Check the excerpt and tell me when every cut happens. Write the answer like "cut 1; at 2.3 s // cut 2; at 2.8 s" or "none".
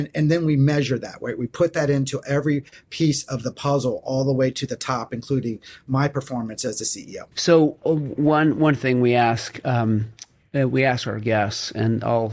cut 1; at 7.3 s

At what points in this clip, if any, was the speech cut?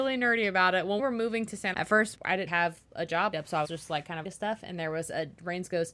cut 1; at 1.0 s // cut 2; at 1.7 s // cut 3; at 2.1 s // cut 4; at 2.5 s // cut 5; at 3.3 s // cut 6; at 3.6 s // cut 7; at 4.2 s

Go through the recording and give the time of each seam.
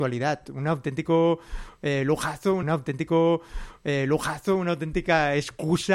cut 1; at 2.6 s

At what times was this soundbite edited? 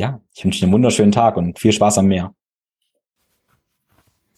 none

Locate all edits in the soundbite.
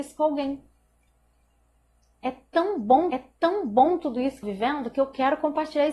cut 1; at 3.1 s // cut 2; at 4.4 s

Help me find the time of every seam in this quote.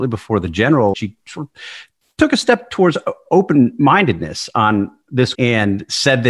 cut 1; at 0.9 s // cut 2; at 5.3 s

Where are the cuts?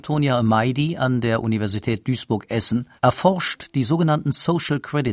cut 1; at 3.0 s

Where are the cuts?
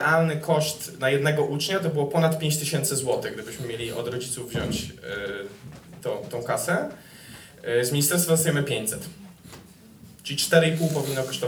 none

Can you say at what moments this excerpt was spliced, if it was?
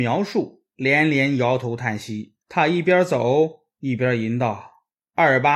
cut 1; at 2.4 s

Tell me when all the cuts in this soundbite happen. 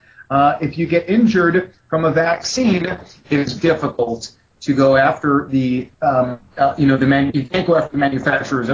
cut 1; at 3.6 s // cut 2; at 5.9 s

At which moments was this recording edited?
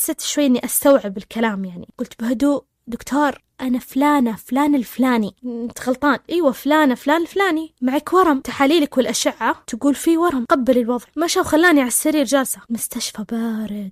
cut 1; at 6.3 s // cut 2; at 11.1 s

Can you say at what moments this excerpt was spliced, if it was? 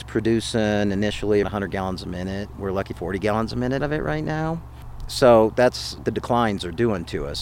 cut 1; at 1.4 s // cut 2; at 2.9 s // cut 3; at 3.8 s // cut 4; at 6.0 s

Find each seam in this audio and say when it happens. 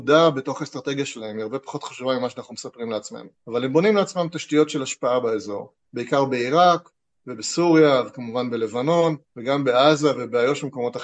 cut 1; at 3.4 s // cut 2; at 5.8 s // cut 3; at 9.3 s

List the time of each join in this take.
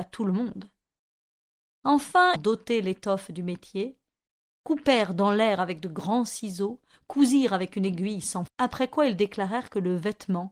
cut 1; at 2.4 s // cut 2; at 8.5 s

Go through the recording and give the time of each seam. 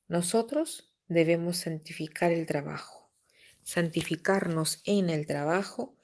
none

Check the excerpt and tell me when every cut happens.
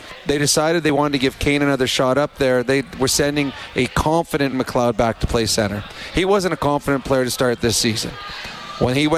cut 1; at 4.5 s

